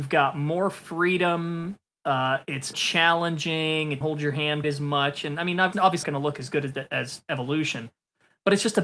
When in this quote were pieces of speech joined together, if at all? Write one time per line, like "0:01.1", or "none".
0:02.7
0:04.0
0:04.6
0:05.7
0:06.0